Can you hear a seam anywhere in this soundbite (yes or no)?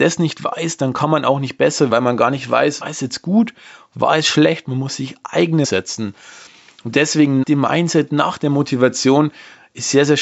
yes